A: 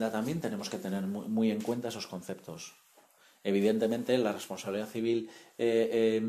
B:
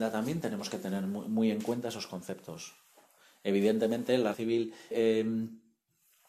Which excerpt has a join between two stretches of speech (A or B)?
B